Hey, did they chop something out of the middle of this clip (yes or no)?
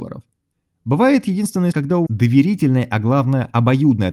yes